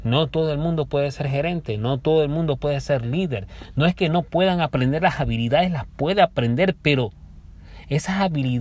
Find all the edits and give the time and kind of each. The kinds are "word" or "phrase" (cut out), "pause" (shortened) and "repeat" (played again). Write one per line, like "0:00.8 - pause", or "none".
none